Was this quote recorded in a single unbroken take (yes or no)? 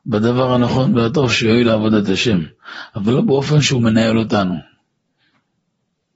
yes